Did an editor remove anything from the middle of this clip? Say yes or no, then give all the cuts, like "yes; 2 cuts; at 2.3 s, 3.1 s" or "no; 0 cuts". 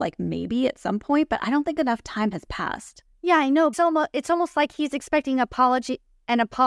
yes; 1 cut; at 3.7 s